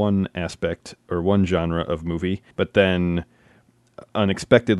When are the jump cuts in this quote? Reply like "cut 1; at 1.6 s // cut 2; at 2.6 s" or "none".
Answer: cut 1; at 2.5 s